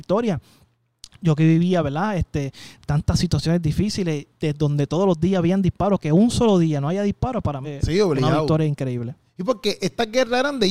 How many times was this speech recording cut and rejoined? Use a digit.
2